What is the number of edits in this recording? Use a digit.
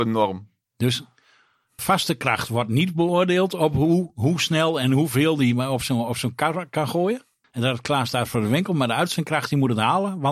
2